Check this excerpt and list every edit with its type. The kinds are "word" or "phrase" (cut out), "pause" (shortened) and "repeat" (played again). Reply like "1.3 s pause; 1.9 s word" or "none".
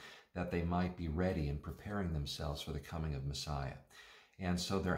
none